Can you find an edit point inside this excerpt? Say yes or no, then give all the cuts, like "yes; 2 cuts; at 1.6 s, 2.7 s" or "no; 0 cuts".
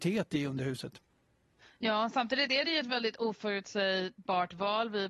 no; 0 cuts